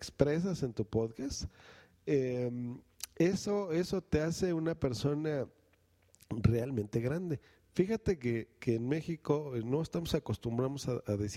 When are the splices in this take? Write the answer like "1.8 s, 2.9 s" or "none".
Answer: none